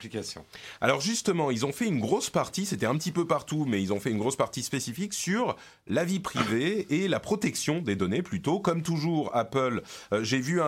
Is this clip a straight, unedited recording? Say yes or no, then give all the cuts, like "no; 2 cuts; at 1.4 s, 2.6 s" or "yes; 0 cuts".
yes; 0 cuts